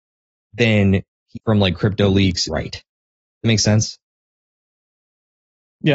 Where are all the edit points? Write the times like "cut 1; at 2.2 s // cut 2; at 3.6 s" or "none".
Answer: cut 1; at 1.4 s // cut 2; at 2.5 s // cut 3; at 3.4 s